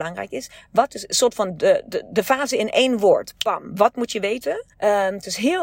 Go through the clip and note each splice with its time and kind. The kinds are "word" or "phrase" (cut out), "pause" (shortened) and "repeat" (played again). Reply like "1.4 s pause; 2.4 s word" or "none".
4.7 s pause